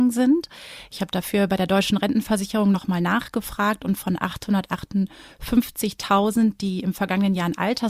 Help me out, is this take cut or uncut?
uncut